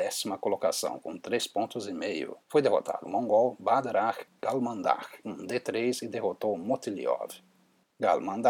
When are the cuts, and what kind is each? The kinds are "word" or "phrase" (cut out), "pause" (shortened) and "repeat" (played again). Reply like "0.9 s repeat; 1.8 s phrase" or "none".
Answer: 2.4 s pause; 3.0 s phrase; 5.2 s phrase